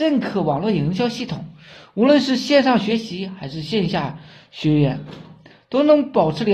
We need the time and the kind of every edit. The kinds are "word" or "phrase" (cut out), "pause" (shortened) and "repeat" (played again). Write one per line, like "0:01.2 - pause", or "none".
none